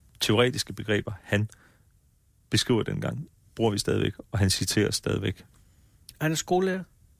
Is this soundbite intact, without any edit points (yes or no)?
yes